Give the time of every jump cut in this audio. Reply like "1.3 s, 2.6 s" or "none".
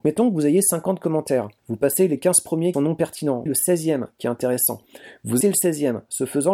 1.6 s, 2.7 s, 3.5 s, 5.4 s